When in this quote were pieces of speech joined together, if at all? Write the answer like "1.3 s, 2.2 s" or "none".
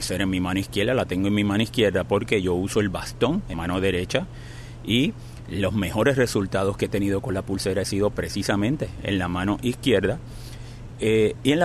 3.5 s